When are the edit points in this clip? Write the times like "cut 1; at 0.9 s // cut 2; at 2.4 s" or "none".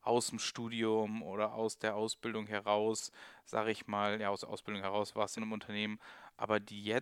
cut 1; at 5.4 s